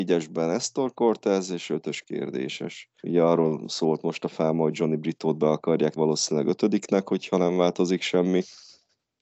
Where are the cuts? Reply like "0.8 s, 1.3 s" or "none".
3.0 s, 6.0 s